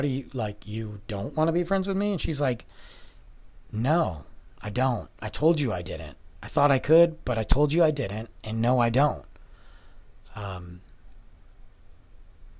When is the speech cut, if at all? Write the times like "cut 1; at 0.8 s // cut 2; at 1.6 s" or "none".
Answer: none